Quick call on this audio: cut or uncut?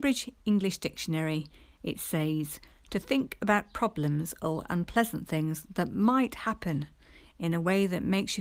uncut